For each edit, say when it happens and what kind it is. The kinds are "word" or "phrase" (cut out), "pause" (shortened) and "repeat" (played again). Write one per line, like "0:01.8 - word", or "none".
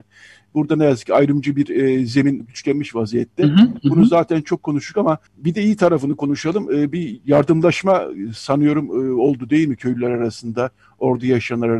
0:02.4 - word
0:05.3 - pause